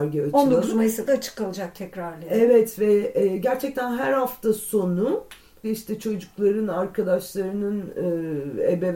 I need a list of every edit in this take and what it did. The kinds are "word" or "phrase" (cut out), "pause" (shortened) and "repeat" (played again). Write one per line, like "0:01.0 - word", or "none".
0:01.1 - word
0:05.6 - word